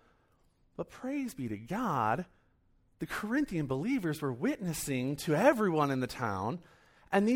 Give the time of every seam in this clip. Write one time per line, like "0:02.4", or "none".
none